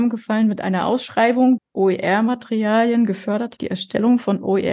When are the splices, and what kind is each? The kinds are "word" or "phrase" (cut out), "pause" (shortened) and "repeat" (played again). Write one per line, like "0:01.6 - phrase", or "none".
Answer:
0:01.6 - word
0:03.6 - word